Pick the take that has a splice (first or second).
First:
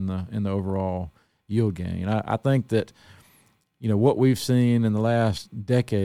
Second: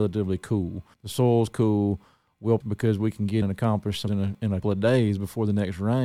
second